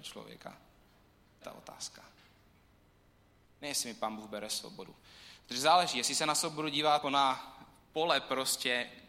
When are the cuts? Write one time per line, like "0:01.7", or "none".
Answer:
0:01.4
0:07.0